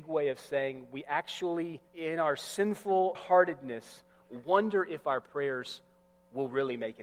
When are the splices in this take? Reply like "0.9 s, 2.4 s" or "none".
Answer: 1.9 s, 3.1 s